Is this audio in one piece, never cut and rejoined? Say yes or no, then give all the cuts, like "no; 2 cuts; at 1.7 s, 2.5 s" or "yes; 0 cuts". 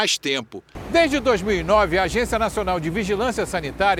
yes; 0 cuts